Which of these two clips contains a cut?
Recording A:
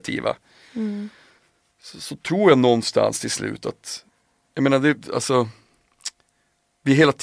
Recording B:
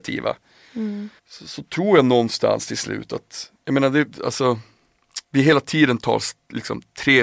B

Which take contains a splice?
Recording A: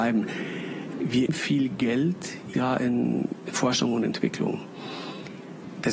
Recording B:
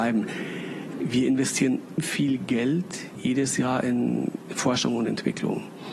A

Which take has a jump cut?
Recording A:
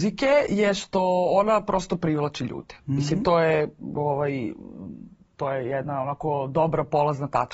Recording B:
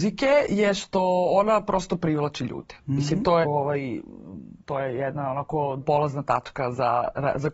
B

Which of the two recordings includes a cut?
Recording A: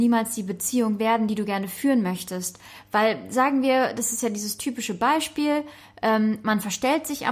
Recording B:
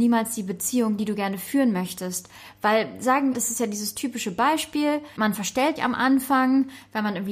B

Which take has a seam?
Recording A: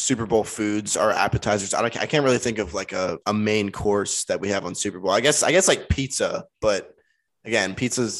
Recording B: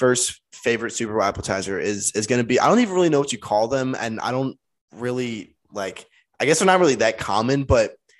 A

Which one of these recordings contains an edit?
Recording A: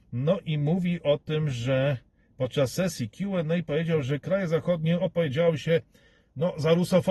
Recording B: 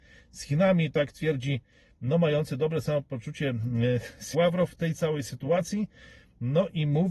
B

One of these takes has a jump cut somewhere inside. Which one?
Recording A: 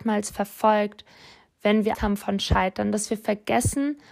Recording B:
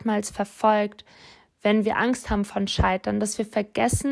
A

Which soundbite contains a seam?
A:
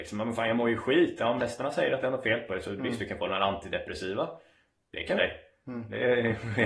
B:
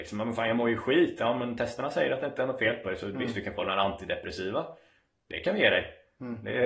A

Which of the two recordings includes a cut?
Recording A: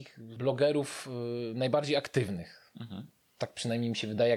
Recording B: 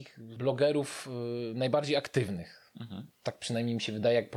B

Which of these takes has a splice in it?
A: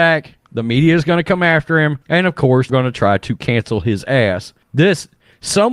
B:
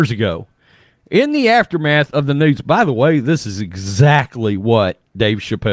A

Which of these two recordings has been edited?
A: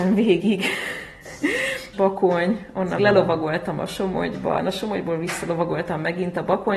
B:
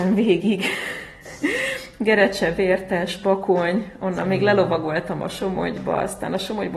A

